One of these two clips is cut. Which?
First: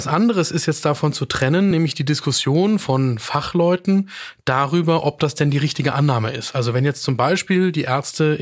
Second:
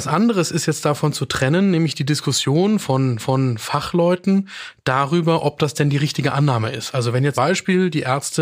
second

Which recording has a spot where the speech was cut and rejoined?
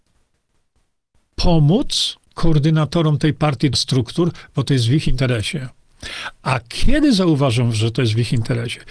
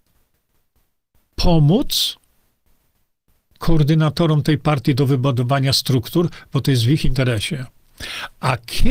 first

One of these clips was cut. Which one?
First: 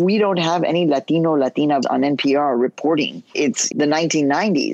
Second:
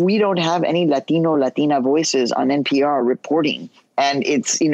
first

